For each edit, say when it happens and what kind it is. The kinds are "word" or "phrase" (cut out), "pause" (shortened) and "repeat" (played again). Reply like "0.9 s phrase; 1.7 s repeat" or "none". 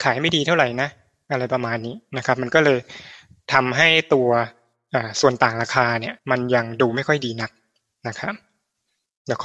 6.2 s pause